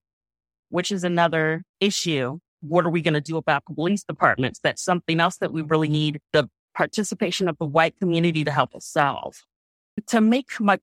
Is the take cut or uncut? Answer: uncut